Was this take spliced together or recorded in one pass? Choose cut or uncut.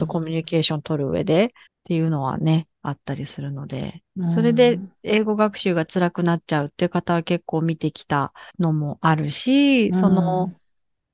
cut